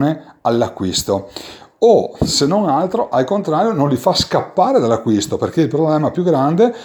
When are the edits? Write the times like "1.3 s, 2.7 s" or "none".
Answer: none